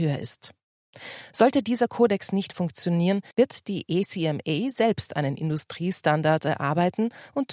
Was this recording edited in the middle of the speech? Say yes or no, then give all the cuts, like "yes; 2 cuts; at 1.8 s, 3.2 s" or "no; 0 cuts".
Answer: yes; 1 cut; at 3.3 s